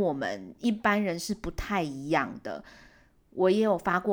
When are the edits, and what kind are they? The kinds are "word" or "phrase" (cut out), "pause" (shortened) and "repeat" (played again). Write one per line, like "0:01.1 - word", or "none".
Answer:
none